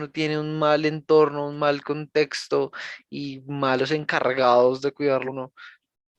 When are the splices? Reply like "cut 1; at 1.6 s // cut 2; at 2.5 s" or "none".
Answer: cut 1; at 5.3 s